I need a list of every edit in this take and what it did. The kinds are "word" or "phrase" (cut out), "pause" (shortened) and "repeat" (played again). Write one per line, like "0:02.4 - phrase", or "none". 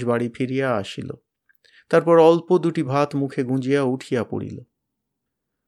none